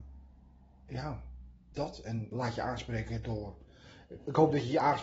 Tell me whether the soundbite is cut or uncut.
uncut